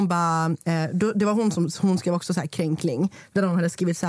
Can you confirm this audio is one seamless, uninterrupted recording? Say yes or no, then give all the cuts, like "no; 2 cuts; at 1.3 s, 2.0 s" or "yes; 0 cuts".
yes; 0 cuts